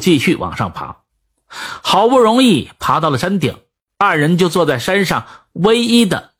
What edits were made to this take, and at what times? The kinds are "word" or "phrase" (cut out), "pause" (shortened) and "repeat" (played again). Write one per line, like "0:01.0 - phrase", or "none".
none